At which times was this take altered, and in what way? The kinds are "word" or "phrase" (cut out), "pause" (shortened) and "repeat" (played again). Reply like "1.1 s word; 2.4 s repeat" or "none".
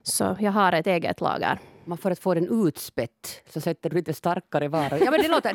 none